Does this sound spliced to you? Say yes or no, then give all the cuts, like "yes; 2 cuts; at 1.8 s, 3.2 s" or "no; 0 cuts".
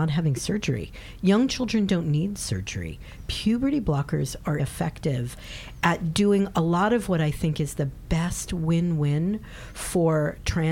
yes; 1 cut; at 4.6 s